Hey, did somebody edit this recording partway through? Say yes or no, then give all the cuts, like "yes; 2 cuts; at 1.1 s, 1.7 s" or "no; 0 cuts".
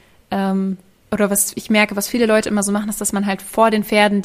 yes; 1 cut; at 1.0 s